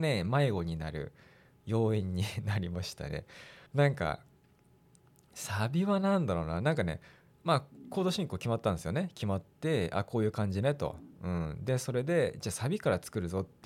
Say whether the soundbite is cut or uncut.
cut